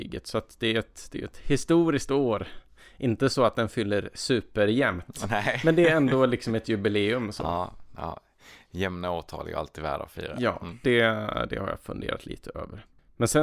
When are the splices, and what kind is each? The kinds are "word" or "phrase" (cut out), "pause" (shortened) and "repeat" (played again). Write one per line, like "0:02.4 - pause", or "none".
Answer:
none